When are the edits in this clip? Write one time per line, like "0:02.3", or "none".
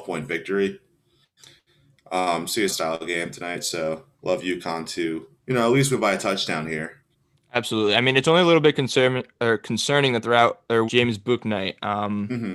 0:02.7
0:04.1
0:05.4
0:10.9